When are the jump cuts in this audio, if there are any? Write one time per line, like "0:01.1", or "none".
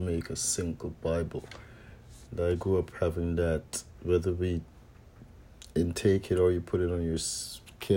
none